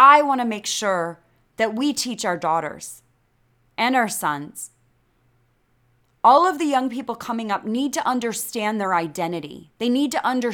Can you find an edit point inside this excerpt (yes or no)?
no